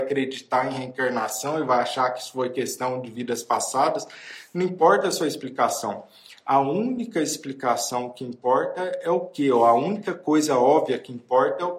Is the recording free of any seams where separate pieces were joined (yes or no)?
yes